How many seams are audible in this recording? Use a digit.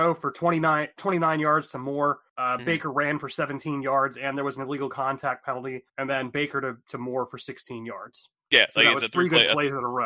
3